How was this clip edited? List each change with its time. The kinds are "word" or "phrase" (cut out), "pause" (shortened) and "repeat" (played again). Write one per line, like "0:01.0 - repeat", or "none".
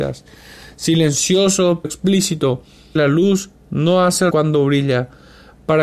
0:01.8 - word
0:03.0 - word
0:04.3 - word